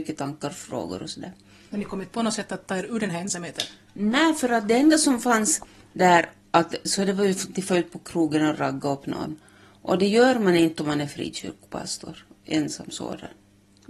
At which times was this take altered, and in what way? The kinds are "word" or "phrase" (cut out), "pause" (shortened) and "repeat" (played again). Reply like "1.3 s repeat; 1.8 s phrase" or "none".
none